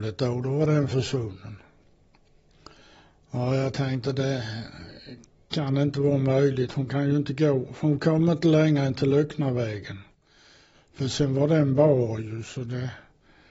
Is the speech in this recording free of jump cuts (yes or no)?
yes